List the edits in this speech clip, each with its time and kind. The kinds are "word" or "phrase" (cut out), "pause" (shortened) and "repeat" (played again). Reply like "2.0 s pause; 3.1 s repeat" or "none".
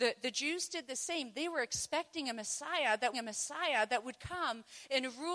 3.1 s repeat